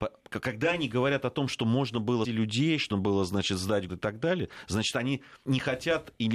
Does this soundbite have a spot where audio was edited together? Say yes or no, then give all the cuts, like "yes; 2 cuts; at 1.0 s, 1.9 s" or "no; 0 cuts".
yes; 4 cuts; at 2.2 s, 2.9 s, 3.9 s, 5.5 s